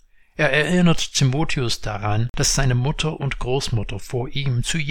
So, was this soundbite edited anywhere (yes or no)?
no